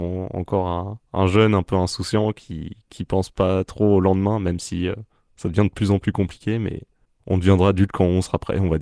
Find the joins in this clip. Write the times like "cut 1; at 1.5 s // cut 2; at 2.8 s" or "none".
none